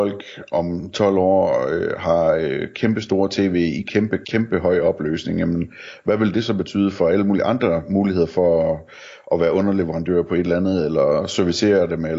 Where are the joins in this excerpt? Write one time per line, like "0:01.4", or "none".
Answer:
none